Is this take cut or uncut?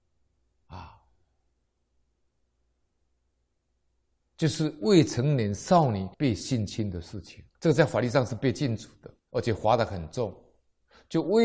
cut